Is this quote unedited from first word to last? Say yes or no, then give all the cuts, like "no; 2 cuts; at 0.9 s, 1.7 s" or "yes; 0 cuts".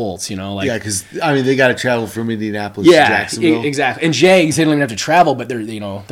yes; 0 cuts